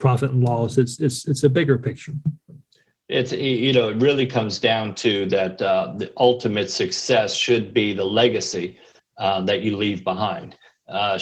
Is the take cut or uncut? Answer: uncut